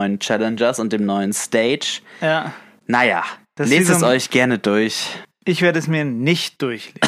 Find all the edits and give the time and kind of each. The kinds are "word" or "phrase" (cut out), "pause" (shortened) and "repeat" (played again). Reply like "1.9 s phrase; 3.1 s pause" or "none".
none